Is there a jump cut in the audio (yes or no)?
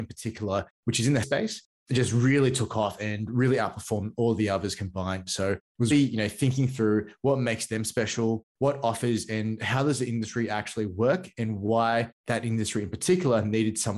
yes